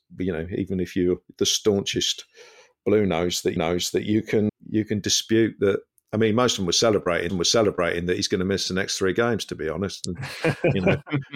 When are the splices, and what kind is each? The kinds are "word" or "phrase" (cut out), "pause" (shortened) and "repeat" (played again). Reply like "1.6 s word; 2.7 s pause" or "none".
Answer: 3.6 s repeat; 4.5 s word; 5.9 s pause; 7.3 s repeat